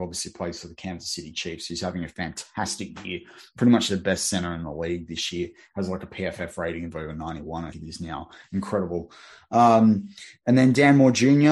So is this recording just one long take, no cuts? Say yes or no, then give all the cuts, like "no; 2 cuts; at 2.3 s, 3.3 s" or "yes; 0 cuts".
no; 1 cut; at 7.7 s